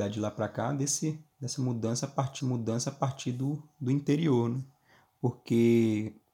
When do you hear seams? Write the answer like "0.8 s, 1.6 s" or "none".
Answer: 1.3 s, 2.4 s